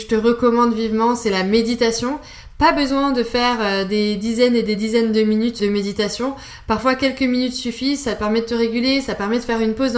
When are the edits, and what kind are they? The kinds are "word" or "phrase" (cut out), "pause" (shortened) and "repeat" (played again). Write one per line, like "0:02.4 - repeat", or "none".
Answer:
0:05.6 - word